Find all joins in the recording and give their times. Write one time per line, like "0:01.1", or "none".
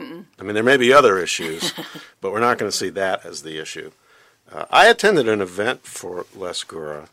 none